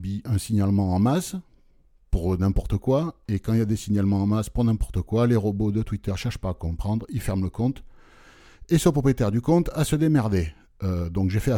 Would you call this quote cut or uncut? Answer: uncut